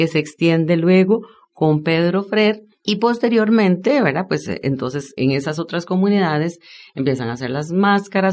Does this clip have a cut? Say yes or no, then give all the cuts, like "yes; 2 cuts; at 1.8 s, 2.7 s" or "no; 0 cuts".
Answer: no; 0 cuts